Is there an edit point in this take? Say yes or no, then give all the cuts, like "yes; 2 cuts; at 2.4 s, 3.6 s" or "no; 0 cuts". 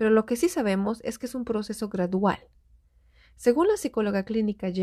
no; 0 cuts